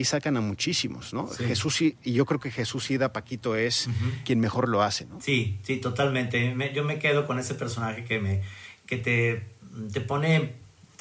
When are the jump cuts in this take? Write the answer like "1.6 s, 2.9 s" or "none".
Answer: none